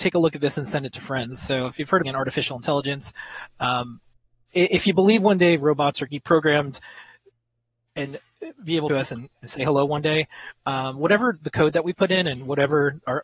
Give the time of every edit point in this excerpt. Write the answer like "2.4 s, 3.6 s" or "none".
2.0 s, 6.1 s, 8.9 s, 9.3 s